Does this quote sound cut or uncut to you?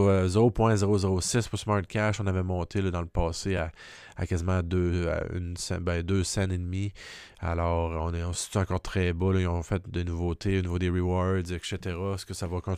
uncut